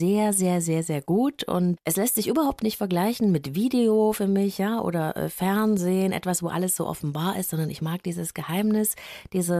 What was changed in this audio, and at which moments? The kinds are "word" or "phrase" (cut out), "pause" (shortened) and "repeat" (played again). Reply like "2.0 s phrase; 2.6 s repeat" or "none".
1.8 s word